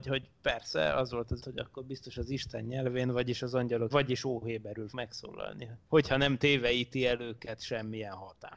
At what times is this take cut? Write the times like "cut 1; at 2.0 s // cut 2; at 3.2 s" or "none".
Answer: cut 1; at 1.4 s // cut 2; at 3.9 s // cut 3; at 4.9 s